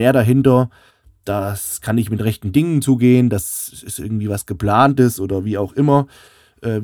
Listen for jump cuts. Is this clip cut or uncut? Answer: uncut